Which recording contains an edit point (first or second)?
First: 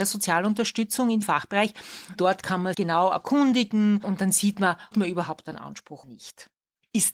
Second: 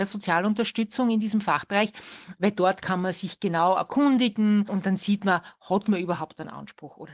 first